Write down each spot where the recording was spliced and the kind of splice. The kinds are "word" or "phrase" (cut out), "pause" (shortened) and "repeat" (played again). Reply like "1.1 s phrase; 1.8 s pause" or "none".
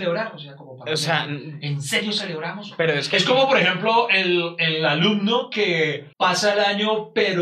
6.1 s pause